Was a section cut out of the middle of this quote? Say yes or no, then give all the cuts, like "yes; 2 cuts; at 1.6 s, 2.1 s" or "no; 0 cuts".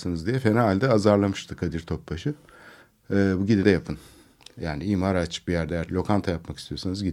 yes; 2 cuts; at 3.6 s, 5.9 s